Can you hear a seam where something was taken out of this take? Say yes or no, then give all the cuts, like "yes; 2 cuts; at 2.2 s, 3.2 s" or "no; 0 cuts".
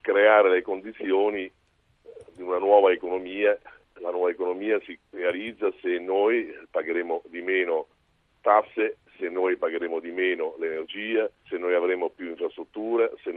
yes; 4 cuts; at 3.8 s, 5.0 s, 9.1 s, 11.4 s